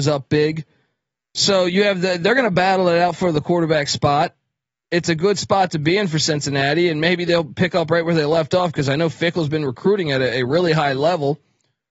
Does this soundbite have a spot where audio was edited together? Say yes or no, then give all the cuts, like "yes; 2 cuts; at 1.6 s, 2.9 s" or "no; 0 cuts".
no; 0 cuts